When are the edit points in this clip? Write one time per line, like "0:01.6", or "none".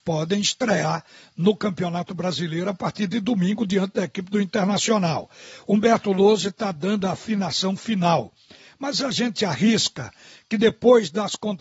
none